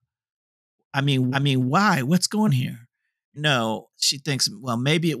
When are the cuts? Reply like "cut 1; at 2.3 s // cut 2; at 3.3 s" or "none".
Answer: cut 1; at 1.3 s // cut 2; at 2.5 s // cut 3; at 3.4 s // cut 4; at 3.9 s